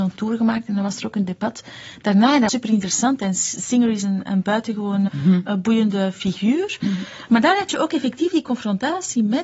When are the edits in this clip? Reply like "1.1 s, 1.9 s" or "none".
2.5 s, 5.1 s